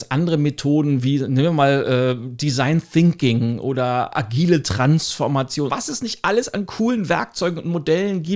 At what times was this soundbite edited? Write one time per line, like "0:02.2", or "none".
0:05.7